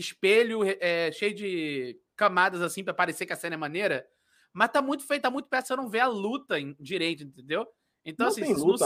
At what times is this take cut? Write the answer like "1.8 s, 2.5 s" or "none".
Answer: none